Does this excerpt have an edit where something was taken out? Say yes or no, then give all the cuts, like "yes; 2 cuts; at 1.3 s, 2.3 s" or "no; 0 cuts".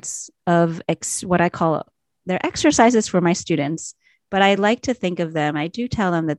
no; 0 cuts